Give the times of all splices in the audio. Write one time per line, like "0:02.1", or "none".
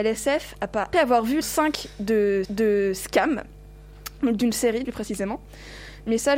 0:00.9
0:01.4
0:02.4
0:04.8